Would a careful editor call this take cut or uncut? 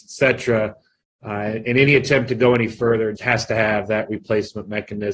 cut